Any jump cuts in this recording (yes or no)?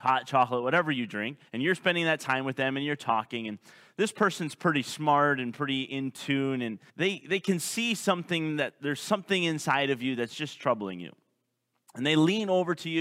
yes